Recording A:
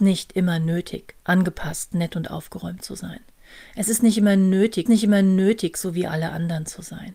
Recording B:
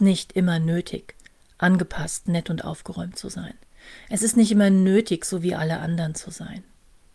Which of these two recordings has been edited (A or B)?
A